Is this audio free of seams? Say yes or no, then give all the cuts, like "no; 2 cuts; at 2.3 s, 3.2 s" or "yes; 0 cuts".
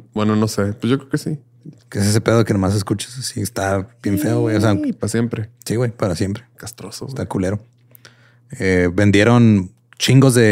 no; 1 cut; at 1.8 s